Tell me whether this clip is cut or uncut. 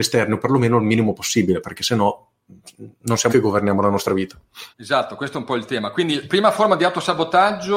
cut